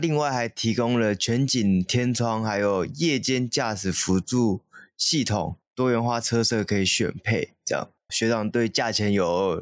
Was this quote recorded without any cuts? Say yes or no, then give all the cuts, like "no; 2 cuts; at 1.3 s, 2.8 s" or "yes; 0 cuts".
no; 1 cut; at 8.1 s